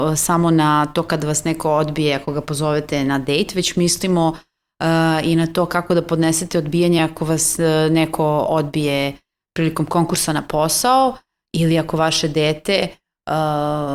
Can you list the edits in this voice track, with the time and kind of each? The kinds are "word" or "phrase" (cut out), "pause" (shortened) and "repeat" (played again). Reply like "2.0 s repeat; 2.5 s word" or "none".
none